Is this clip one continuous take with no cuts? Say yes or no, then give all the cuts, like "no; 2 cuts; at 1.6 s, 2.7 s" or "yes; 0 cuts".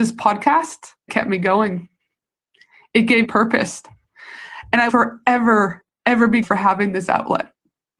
no; 4 cuts; at 1.1 s, 3.2 s, 4.9 s, 6.4 s